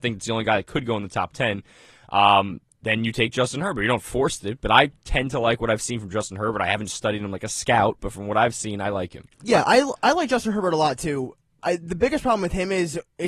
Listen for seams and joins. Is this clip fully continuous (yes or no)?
yes